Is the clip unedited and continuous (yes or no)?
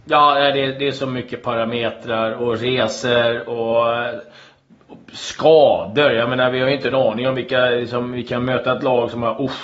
yes